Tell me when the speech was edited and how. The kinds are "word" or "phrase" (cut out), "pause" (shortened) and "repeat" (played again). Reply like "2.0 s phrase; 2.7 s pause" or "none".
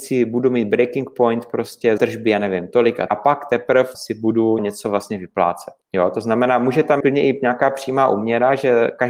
2.0 s phrase; 3.1 s word; 3.9 s word; 4.6 s word; 5.8 s pause; 7.0 s word